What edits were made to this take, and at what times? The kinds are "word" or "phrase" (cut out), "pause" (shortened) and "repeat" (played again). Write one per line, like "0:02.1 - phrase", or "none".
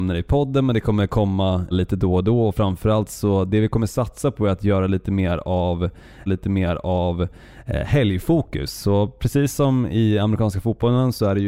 0:01.7 - word
0:06.3 - repeat